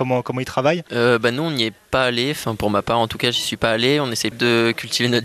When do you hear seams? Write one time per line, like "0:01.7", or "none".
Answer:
0:04.3